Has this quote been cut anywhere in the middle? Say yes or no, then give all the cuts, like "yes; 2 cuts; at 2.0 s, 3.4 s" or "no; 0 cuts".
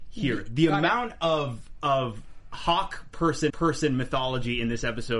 yes; 1 cut; at 3.5 s